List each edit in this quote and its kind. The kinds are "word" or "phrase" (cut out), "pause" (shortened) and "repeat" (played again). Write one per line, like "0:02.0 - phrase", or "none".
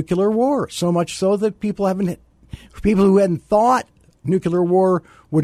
none